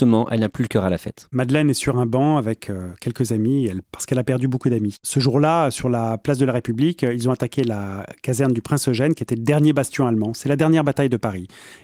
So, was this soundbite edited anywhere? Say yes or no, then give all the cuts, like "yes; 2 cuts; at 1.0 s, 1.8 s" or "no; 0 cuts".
yes; 1 cut; at 3.8 s